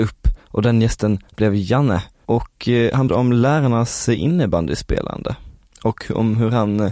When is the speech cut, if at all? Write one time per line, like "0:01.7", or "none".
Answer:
0:03.1